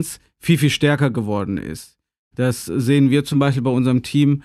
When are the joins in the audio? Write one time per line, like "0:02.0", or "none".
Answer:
none

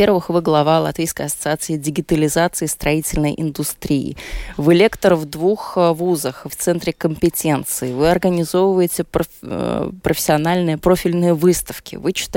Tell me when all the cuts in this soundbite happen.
0:06.5

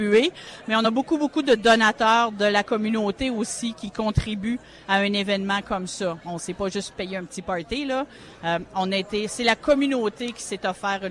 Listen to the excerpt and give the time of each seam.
none

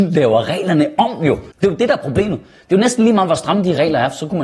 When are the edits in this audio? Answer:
0:01.5

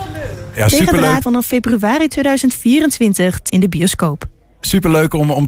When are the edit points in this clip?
0:01.2
0:03.5

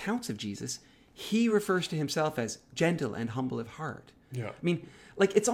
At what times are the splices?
none

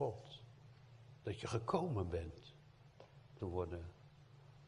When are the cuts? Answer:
0:01.2
0:03.4

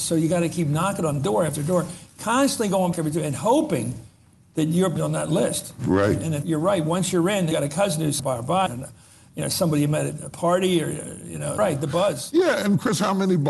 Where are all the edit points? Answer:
0:02.9
0:05.0
0:06.4
0:07.5
0:08.2
0:08.7
0:11.6

